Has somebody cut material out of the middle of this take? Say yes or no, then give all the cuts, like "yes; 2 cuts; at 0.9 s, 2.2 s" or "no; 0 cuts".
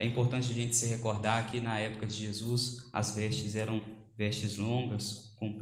no; 0 cuts